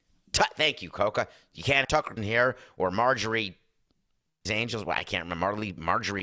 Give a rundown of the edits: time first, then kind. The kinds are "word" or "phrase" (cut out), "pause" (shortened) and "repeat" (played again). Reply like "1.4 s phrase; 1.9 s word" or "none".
1.8 s word; 2.2 s word; 4.5 s word

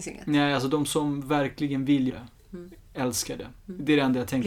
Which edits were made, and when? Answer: 2.1 s word

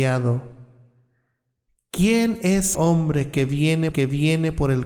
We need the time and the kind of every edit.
2.7 s word; 3.9 s repeat

